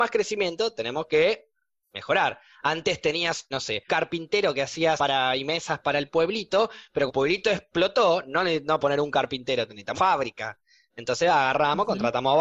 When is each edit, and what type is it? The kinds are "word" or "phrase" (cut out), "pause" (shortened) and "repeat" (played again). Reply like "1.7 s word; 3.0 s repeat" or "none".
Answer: 3.5 s word; 3.9 s word; 5.0 s word; 7.1 s word; 8.8 s word; 9.9 s word